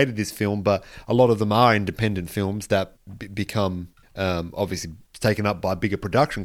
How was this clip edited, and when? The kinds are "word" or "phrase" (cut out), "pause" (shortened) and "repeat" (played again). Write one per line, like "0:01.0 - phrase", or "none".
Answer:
0:04.0 - pause